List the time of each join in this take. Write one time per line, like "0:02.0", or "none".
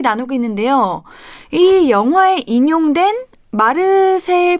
none